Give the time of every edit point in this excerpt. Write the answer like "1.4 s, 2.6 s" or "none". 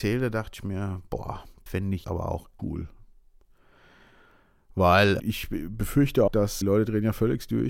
1.7 s, 2.0 s, 2.6 s, 5.2 s, 6.3 s, 6.6 s